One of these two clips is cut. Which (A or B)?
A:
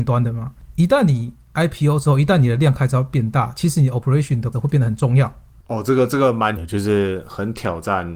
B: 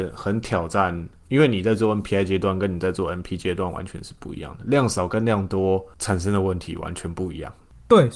A